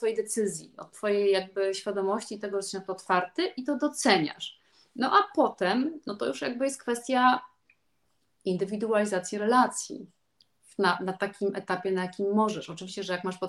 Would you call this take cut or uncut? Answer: uncut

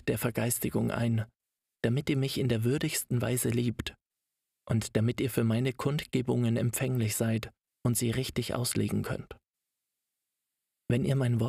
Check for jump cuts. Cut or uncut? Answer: uncut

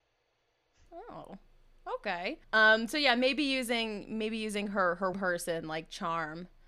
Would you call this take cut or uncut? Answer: cut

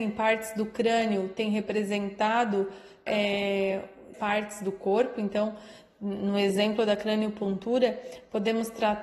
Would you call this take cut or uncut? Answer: cut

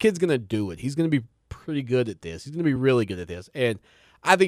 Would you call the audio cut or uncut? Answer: uncut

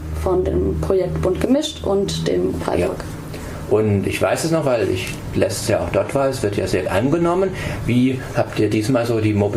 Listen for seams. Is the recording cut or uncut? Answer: cut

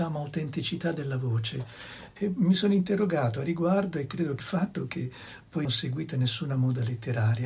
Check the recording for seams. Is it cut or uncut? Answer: cut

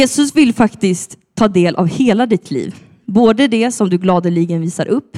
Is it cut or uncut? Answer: uncut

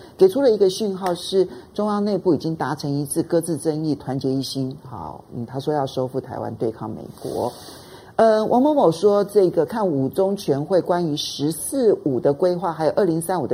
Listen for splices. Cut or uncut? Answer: uncut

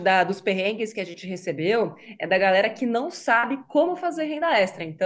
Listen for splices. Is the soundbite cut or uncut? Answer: uncut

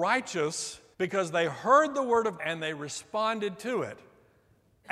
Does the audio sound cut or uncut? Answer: cut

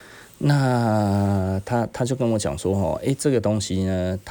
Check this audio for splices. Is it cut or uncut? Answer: uncut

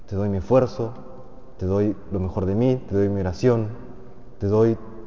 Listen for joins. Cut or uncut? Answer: uncut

